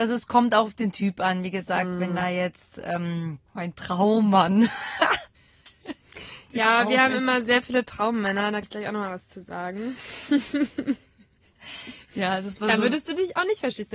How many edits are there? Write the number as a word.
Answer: three